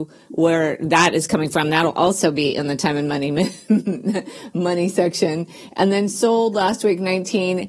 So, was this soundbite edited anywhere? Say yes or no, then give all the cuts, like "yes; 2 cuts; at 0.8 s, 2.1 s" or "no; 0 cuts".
no; 0 cuts